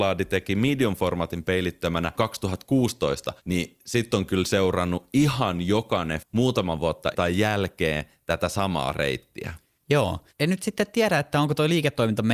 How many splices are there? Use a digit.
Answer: 3